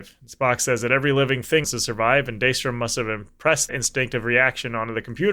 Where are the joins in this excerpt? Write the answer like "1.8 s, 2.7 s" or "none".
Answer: 1.6 s, 3.7 s